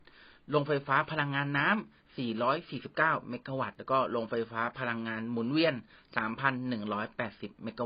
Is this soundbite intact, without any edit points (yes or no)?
yes